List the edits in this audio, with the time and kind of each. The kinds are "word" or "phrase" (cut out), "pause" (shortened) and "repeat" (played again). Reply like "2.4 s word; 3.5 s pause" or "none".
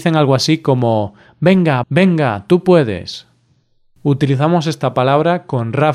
1.8 s phrase

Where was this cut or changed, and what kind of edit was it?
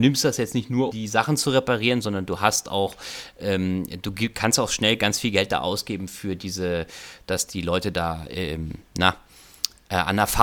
0.9 s word

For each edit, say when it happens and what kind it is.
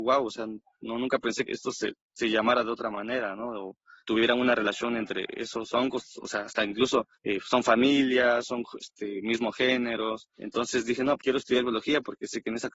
1.5 s word; 4.0 s word; 7.1 s pause; 10.3 s pause; 11.2 s word

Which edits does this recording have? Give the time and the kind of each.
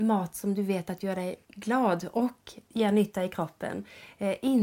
1.4 s pause

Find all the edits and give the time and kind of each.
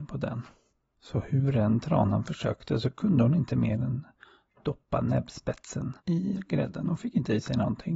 6.0 s pause

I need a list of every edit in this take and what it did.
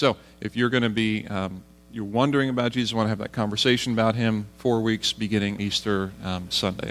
5.6 s word

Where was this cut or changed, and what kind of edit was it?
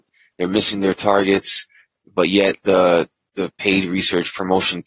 none

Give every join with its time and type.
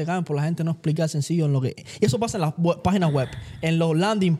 none

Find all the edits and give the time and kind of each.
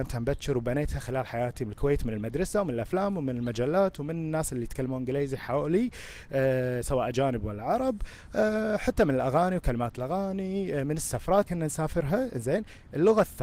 11.5 s word

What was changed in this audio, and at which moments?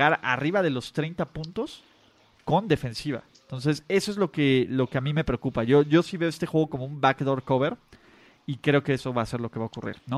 none

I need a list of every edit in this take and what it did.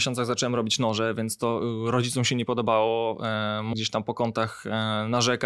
3.7 s word

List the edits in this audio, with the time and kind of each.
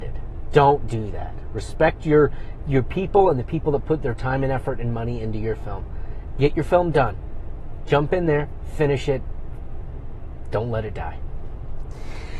none

